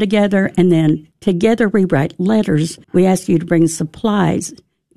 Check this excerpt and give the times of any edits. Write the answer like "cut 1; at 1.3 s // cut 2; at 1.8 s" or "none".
cut 1; at 1.1 s // cut 2; at 2.8 s